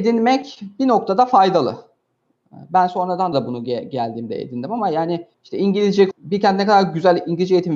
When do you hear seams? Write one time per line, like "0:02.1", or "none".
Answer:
0:03.3
0:05.3
0:06.1